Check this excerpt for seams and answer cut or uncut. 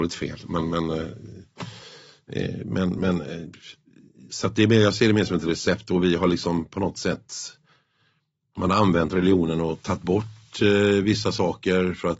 uncut